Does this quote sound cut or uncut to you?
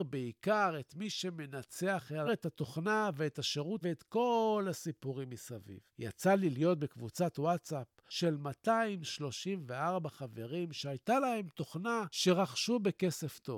cut